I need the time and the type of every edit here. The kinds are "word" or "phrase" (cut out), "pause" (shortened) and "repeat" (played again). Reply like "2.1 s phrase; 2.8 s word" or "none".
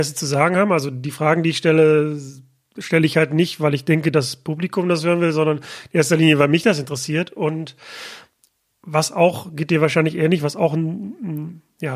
none